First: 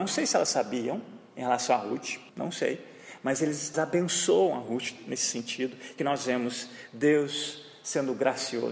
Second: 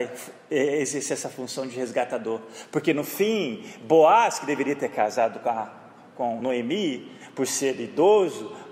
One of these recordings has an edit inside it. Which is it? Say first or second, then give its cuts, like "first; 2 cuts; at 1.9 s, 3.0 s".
first; 3 cuts; at 2.3 s, 3.7 s, 6.0 s